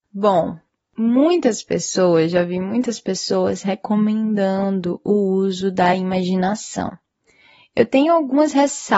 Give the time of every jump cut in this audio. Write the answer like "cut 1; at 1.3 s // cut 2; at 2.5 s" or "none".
none